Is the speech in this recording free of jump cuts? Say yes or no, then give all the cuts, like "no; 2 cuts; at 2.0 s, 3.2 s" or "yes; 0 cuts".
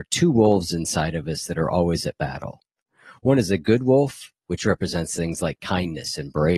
yes; 0 cuts